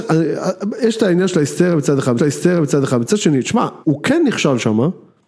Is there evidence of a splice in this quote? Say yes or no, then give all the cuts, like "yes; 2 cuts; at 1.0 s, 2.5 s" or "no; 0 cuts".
yes; 2 cuts; at 2.2 s, 3.8 s